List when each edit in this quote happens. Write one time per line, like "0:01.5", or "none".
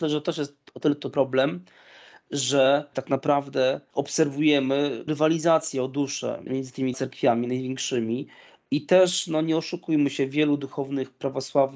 0:01.1
0:05.1
0:06.5
0:06.9